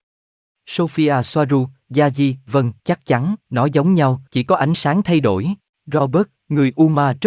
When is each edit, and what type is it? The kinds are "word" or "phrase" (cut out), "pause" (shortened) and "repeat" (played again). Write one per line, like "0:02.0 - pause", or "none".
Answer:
0:02.8 - pause
0:03.4 - pause
0:04.3 - pause
0:05.7 - pause